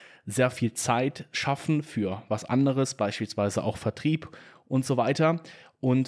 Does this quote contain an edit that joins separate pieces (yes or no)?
no